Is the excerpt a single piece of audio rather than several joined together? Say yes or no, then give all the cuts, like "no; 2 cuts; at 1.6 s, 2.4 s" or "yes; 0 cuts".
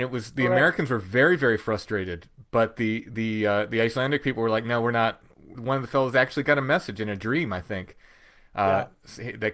yes; 0 cuts